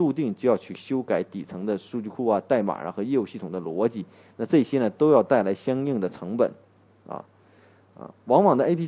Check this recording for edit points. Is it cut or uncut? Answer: uncut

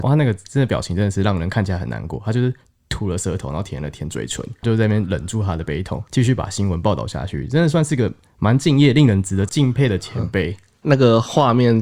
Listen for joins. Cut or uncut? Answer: cut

